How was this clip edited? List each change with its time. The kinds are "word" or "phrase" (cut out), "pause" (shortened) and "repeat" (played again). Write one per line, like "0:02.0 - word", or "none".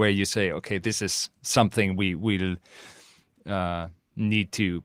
none